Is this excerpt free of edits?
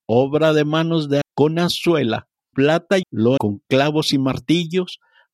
no; 4 cuts; at 1.2 s, 2.5 s, 3.0 s, 3.4 s

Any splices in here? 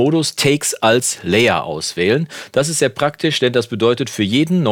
no; 0 cuts

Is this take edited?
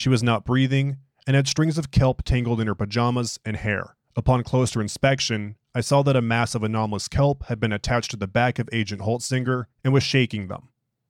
yes; 2 cuts; at 4.0 s, 9.7 s

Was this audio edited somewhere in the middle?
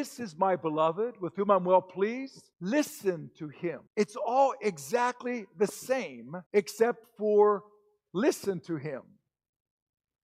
yes; 3 cuts; at 2.5 s, 3.9 s, 6.5 s

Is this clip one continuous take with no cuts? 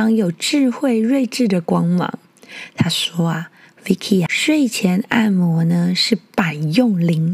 no; 1 cut; at 4.3 s

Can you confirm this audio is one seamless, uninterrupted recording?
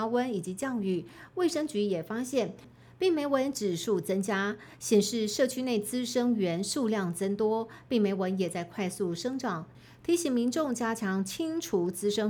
yes; 0 cuts

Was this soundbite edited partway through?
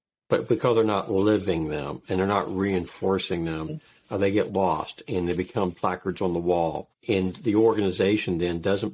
yes; 2 cuts; at 5.7 s, 6.9 s

